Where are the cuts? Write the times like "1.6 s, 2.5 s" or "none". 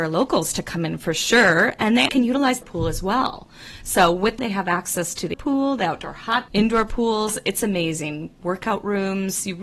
2.1 s, 2.6 s, 4.4 s, 5.3 s, 6.5 s

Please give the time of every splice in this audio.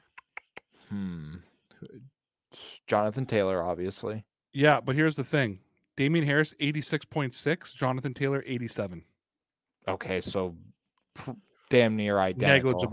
none

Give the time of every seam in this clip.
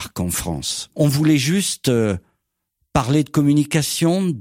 none

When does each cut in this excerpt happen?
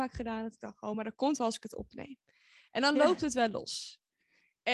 none

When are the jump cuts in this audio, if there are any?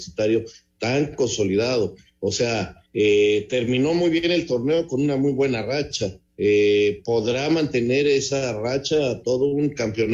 2.9 s, 6.3 s

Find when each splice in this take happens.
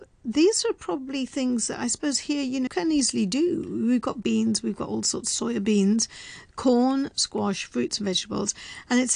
2.7 s, 4.2 s

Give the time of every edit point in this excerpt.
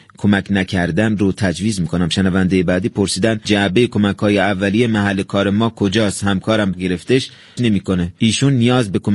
6.7 s, 7.6 s

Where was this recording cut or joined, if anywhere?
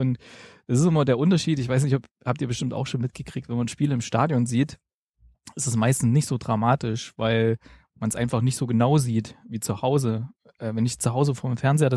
none

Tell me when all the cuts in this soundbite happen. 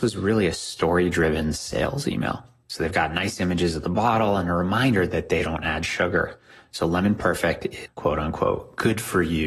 7.9 s

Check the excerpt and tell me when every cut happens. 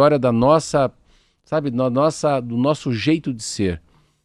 none

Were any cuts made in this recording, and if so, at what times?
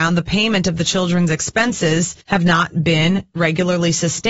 2.2 s

